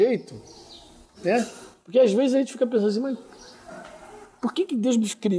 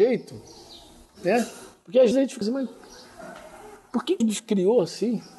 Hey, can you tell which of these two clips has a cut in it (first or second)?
second